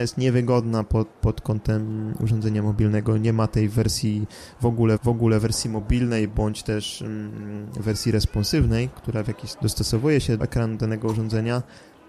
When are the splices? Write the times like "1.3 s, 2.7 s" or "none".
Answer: 1.1 s, 5.0 s, 8.9 s, 9.5 s, 10.4 s